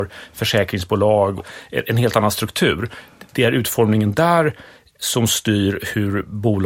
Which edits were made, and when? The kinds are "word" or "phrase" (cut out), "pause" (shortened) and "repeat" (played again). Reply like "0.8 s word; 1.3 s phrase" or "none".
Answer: 1.4 s word